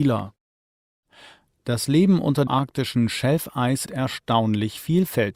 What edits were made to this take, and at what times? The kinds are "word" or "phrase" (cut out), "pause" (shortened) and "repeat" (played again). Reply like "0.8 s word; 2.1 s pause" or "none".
2.5 s word; 3.9 s word